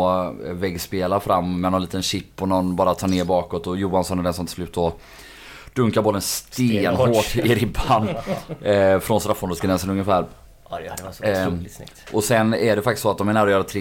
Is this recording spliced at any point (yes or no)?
no